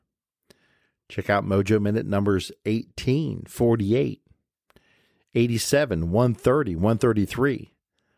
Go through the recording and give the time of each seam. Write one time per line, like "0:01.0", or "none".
none